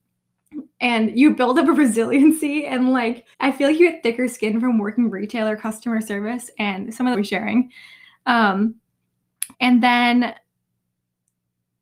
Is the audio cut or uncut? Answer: cut